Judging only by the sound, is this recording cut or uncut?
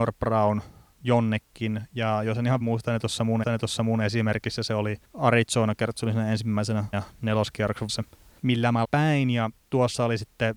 cut